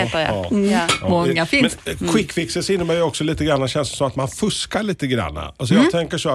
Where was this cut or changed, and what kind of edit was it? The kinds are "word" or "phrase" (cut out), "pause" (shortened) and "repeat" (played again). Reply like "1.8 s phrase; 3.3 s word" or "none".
1.8 s word